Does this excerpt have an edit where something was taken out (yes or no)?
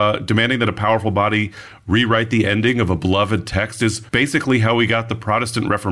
yes